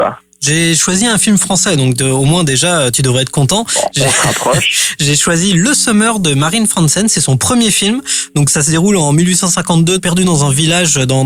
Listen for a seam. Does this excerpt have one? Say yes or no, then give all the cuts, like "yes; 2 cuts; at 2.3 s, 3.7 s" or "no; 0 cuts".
no; 0 cuts